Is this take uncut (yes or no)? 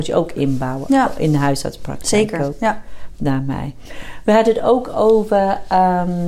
yes